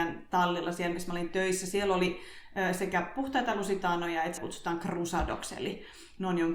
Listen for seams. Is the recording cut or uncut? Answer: cut